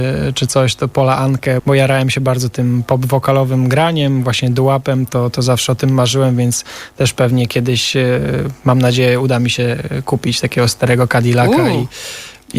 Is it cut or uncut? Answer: cut